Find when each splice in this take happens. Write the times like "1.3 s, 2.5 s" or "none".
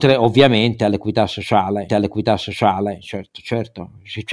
1.9 s